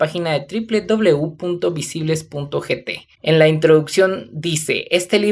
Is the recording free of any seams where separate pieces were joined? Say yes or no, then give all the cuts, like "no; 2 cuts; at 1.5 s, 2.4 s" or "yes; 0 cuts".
no; 1 cut; at 3.1 s